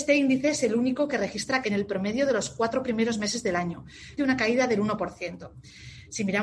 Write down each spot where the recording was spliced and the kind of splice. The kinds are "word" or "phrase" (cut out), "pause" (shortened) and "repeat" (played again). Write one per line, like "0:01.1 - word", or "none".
0:01.6 - word
0:04.2 - word